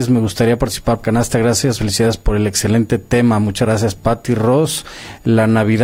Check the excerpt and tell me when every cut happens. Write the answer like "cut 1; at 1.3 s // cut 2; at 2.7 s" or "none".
cut 1; at 1.0 s // cut 2; at 1.8 s